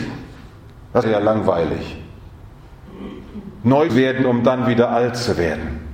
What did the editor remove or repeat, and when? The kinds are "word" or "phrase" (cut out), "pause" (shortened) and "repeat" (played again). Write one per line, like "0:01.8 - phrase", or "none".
0:01.0 - word
0:03.9 - word